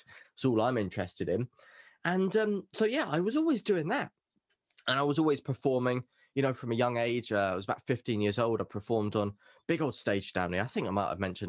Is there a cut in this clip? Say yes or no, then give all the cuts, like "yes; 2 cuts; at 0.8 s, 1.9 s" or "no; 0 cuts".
no; 0 cuts